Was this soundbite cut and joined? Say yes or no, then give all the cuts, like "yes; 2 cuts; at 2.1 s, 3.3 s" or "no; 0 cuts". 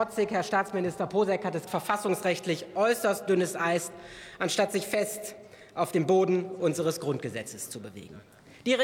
yes; 1 cut; at 1.7 s